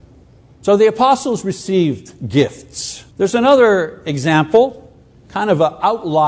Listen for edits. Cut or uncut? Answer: cut